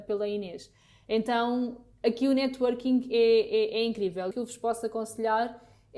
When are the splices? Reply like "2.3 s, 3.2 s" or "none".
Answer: 4.3 s